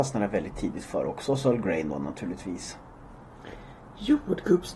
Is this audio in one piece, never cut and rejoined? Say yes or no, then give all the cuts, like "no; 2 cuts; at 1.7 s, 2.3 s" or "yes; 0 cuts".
yes; 0 cuts